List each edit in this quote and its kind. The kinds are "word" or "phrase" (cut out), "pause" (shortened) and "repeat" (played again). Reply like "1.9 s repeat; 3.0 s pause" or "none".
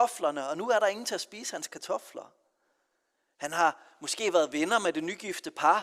none